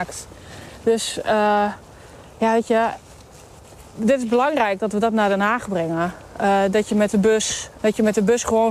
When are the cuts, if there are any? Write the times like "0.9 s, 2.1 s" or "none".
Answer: 3.8 s, 7.8 s